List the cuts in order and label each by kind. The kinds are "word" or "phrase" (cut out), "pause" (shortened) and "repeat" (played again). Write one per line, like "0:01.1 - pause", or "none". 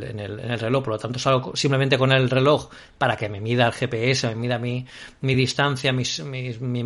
none